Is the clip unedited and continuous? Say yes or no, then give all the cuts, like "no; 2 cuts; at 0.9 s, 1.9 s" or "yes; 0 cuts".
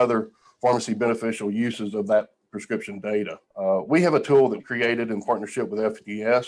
no; 2 cuts; at 3.4 s, 4.6 s